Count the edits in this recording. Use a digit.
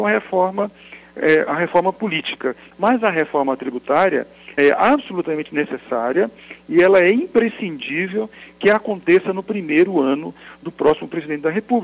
2